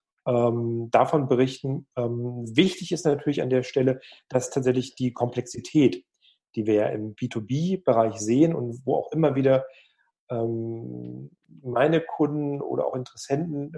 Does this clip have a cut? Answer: no; 0 cuts

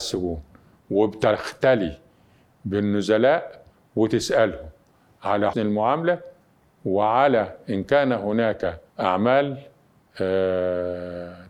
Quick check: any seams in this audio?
yes; 2 cuts; at 5.5 s, 8.9 s

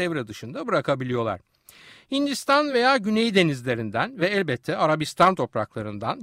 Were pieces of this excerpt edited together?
no; 0 cuts

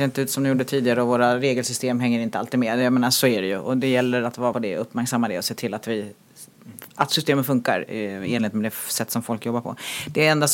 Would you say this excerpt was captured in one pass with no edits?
no; 2 cuts; at 4.5 s, 6.9 s

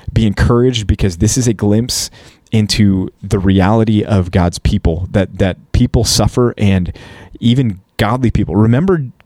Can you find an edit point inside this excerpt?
no; 0 cuts

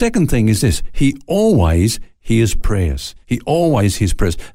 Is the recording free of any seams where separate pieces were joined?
yes; 0 cuts

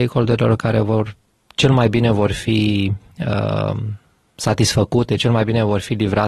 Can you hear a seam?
no; 0 cuts

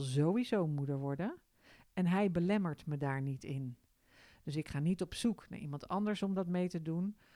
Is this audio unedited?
yes; 0 cuts

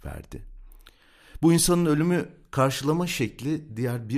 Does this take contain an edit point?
no; 0 cuts

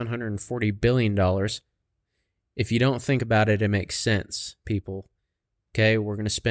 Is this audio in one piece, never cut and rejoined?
yes; 0 cuts

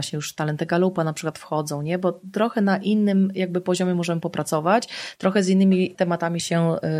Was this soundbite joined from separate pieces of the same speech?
no; 0 cuts

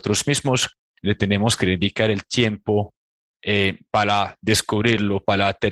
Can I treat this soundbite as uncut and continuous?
yes; 0 cuts

